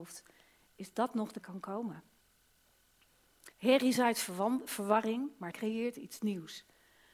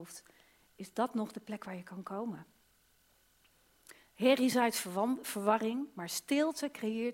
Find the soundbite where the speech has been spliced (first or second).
first